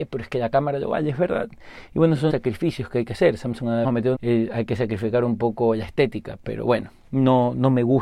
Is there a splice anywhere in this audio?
yes; 3 cuts; at 2.3 s, 3.8 s, 4.1 s

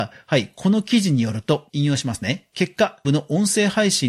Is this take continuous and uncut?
no; 1 cut; at 3.0 s

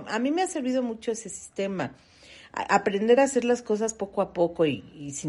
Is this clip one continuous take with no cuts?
yes; 0 cuts

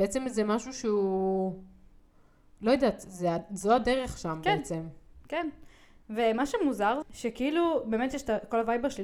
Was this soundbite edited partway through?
yes; 1 cut; at 7.0 s

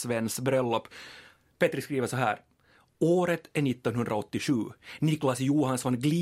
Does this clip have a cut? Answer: no; 0 cuts

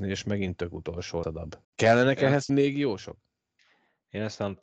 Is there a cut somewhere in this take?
yes; 3 cuts; at 1.2 s, 1.6 s, 2.5 s

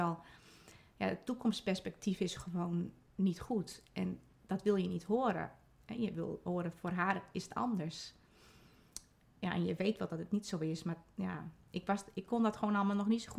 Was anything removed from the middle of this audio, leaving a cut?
no; 0 cuts

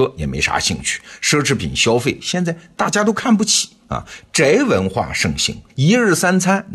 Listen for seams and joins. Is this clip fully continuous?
no; 1 cut; at 5.7 s

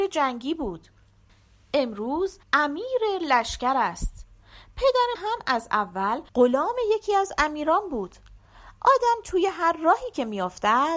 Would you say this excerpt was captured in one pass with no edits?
no; 3 cuts; at 2.4 s, 5.1 s, 6.3 s

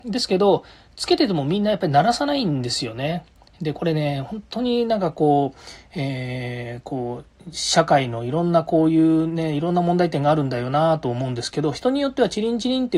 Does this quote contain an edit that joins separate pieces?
no; 0 cuts

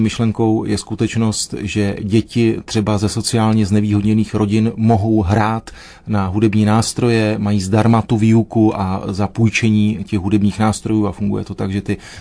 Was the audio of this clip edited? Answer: no; 0 cuts

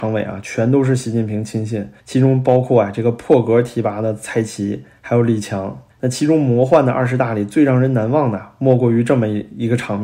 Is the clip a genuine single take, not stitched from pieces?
no; 2 cuts; at 2.0 s, 5.9 s

